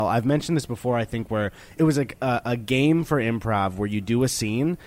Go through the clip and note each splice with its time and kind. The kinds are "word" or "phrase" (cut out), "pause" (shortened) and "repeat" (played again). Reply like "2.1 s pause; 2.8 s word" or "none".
1.8 s word